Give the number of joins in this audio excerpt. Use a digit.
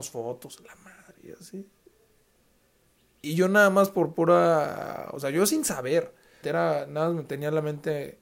1